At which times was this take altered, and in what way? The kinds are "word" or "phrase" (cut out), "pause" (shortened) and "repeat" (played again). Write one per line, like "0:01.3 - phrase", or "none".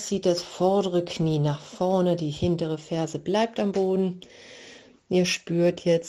none